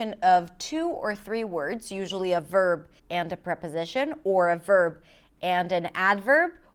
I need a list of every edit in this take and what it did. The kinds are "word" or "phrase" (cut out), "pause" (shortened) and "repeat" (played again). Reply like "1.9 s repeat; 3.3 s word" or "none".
3.0 s pause